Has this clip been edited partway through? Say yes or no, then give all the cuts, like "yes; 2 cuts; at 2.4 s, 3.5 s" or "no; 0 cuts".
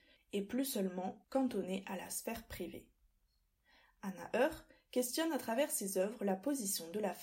no; 0 cuts